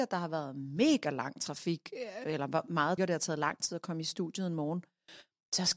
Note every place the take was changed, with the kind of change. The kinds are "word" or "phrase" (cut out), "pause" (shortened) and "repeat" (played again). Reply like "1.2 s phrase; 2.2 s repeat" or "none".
3.0 s word